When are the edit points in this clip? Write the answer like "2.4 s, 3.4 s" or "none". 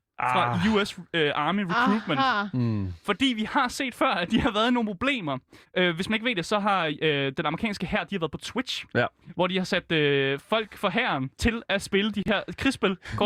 5.6 s, 11.3 s